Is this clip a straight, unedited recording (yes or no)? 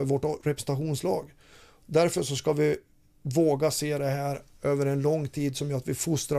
yes